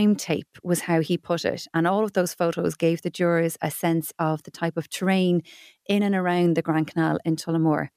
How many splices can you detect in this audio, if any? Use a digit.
0